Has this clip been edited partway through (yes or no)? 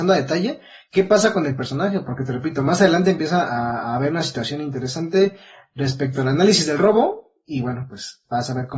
no